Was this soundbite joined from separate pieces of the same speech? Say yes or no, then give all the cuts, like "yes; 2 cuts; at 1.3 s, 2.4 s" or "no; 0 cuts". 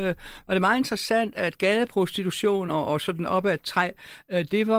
no; 0 cuts